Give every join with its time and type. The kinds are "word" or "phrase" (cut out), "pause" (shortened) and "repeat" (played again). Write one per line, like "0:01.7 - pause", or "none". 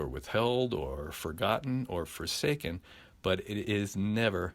none